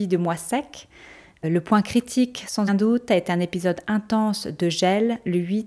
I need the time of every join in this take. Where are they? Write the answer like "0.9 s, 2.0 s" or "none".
1.4 s, 2.7 s